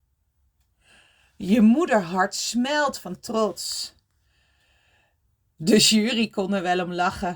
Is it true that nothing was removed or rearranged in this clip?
yes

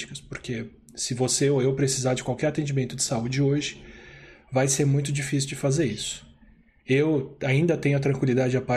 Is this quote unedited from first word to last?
yes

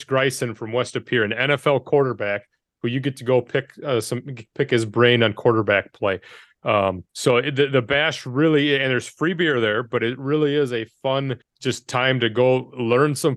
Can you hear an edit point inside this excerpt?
yes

